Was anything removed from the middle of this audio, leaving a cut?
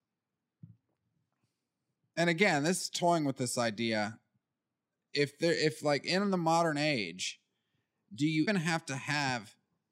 yes; 1 cut; at 8.5 s

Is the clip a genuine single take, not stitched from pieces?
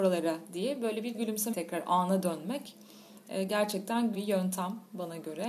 no; 3 cuts; at 1.1 s, 1.5 s, 4.1 s

